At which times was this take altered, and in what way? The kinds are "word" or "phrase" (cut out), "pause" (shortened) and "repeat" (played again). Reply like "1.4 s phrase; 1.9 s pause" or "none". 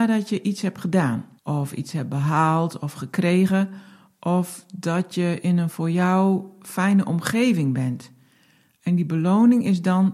1.4 s pause